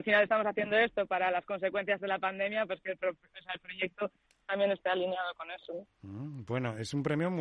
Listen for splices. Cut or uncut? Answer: uncut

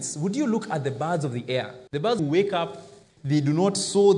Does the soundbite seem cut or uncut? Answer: cut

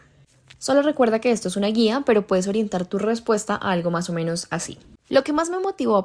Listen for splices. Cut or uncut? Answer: uncut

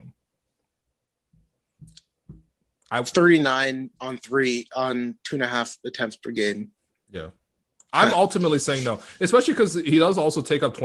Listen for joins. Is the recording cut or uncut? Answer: uncut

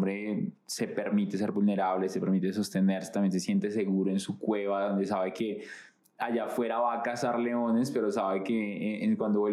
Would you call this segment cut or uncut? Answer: uncut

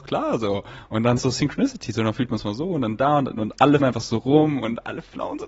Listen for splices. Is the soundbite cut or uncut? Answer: cut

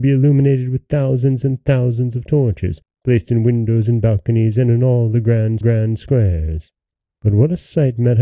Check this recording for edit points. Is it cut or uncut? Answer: cut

